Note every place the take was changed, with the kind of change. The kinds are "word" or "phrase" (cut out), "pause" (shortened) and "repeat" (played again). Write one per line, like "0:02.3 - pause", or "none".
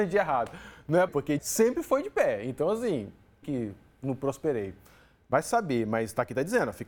0:01.1 - word
0:01.4 - phrase
0:03.4 - phrase